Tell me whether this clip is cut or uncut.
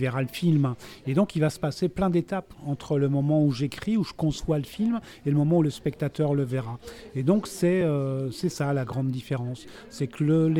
uncut